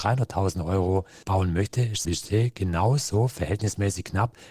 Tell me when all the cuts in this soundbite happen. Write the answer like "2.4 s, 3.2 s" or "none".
1.2 s, 2.0 s